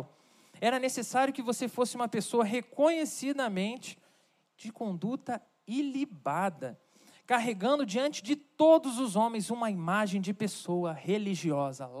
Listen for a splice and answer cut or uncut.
uncut